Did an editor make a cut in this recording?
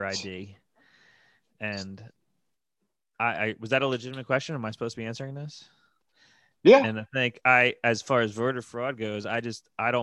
no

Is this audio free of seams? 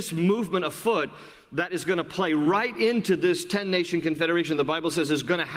yes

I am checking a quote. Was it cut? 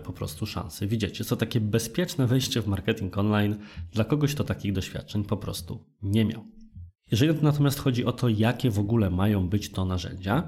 no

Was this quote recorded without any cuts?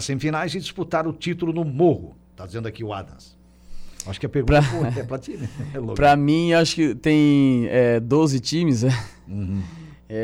yes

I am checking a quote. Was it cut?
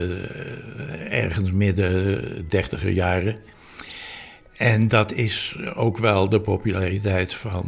no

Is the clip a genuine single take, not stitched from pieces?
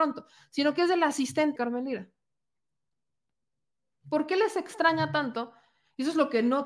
no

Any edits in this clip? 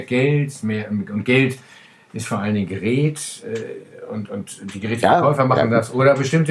no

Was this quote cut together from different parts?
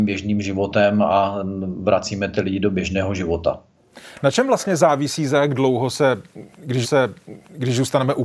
yes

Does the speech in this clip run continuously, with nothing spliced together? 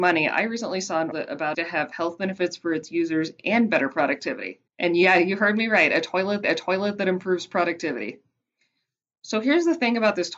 no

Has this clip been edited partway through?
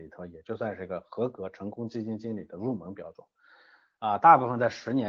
no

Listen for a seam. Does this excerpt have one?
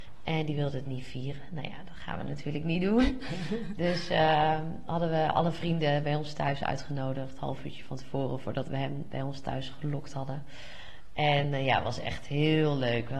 no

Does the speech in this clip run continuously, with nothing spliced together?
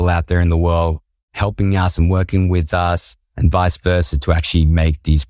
yes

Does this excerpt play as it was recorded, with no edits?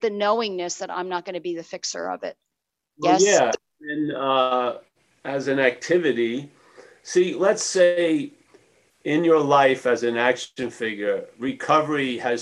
yes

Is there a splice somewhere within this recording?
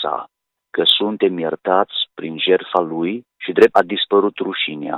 yes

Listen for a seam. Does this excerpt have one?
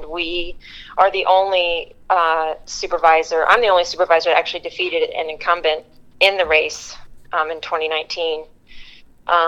no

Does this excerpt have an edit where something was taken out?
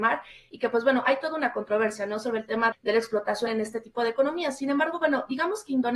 yes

